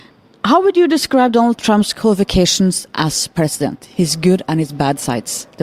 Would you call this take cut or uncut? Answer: uncut